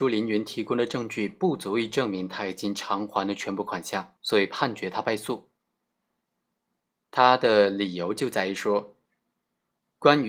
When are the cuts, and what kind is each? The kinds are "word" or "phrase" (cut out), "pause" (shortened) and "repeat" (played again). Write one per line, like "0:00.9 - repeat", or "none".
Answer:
0:04.2 - pause